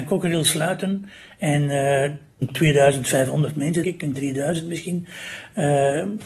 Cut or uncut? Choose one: cut